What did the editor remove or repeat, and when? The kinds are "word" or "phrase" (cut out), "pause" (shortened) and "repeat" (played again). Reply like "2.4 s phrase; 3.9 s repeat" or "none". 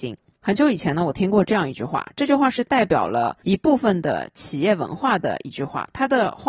3.4 s pause